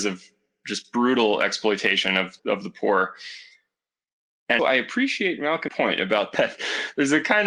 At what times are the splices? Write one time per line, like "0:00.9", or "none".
0:02.4
0:04.6
0:05.7
0:06.3